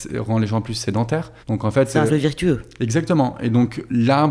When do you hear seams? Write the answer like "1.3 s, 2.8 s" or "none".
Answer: 1.4 s, 2.1 s